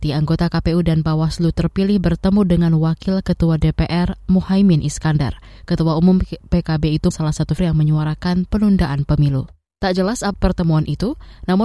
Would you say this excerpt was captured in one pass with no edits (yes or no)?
no